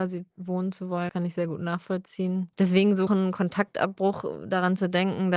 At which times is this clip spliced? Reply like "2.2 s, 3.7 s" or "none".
1.1 s, 2.5 s, 3.1 s